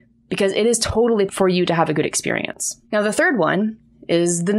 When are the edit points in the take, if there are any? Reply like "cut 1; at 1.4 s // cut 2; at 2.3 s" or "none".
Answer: cut 1; at 1.3 s // cut 2; at 2.8 s